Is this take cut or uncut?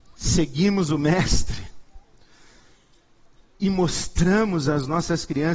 uncut